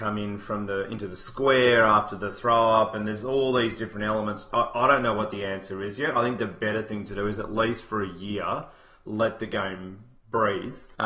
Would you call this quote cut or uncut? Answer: uncut